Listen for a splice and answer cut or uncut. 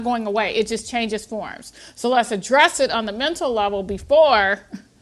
uncut